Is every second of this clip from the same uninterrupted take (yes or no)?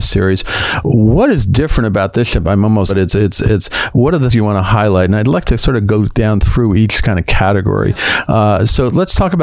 no